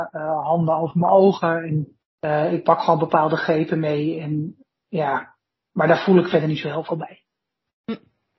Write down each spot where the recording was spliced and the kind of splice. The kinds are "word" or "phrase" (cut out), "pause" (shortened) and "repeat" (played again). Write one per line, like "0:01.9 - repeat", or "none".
0:02.0 - pause